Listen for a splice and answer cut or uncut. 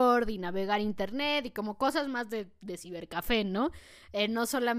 uncut